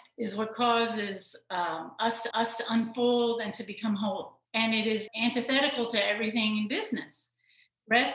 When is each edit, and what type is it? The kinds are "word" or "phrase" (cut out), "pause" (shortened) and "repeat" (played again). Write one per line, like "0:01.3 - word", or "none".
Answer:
0:02.3 - repeat
0:04.4 - pause
0:05.1 - word